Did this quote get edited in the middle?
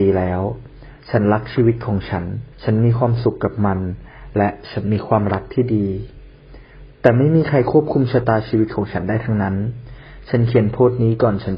yes; 1 cut; at 2.5 s

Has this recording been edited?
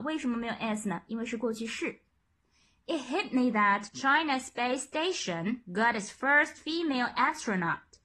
no; 0 cuts

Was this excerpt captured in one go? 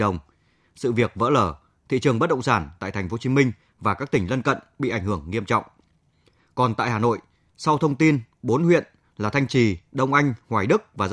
yes; 0 cuts

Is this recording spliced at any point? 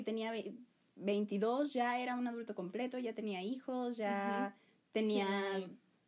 no; 0 cuts

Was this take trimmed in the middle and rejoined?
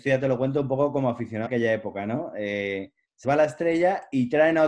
yes; 2 cuts; at 1.5 s, 3.2 s

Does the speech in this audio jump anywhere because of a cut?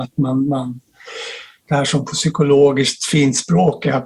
no; 0 cuts

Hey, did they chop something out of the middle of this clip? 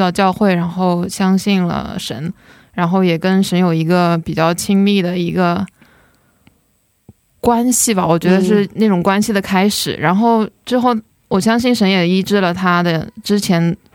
no; 0 cuts

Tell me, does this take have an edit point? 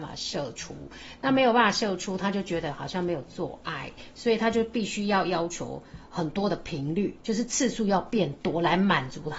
yes; 1 cut; at 7.2 s

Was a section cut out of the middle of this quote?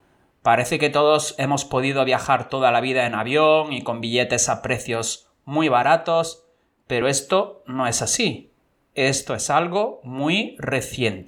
no; 0 cuts

